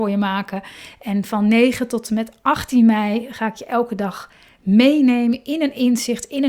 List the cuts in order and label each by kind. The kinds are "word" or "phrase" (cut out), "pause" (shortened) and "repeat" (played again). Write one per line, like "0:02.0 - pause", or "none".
none